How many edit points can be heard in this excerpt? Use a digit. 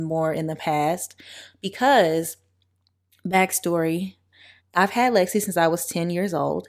1